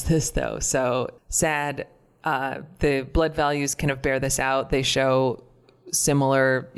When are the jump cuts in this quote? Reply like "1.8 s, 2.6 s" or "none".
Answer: 1.2 s